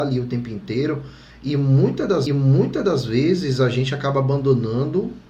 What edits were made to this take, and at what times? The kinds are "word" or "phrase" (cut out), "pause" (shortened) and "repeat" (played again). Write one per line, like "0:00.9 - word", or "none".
0:02.3 - repeat